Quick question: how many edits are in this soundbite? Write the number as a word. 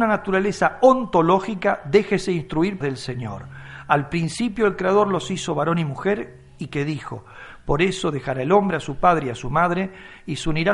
one